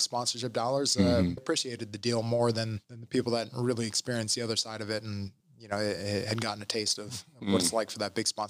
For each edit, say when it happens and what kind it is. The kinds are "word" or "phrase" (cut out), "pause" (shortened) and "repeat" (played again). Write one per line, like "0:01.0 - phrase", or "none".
0:01.4 - phrase
0:02.8 - pause
0:05.4 - pause